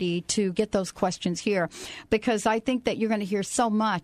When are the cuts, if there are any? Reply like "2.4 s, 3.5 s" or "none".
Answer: none